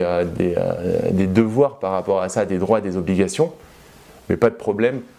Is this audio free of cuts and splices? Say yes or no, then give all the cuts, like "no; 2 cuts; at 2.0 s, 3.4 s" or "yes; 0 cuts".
yes; 0 cuts